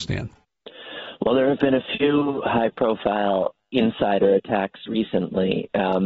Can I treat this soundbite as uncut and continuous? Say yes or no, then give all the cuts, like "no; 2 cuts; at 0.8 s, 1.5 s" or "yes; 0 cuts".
no; 1 cut; at 4.9 s